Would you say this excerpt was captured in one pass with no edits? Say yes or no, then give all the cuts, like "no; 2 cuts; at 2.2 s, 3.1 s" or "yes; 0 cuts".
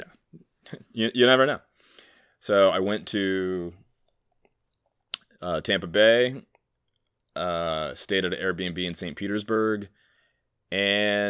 yes; 0 cuts